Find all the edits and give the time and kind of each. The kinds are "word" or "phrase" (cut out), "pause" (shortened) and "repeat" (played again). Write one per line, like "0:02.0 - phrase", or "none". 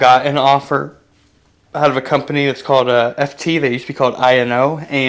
none